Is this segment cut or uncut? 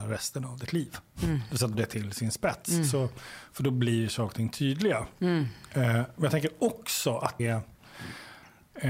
cut